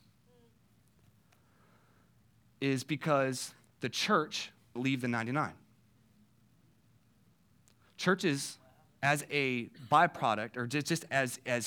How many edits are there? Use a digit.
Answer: 1